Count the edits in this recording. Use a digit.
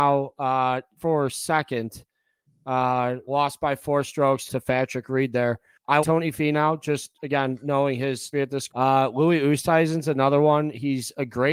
6